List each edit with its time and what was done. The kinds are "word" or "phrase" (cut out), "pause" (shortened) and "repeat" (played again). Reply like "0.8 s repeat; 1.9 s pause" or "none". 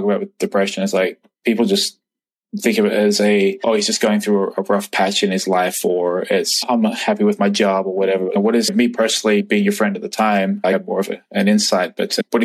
none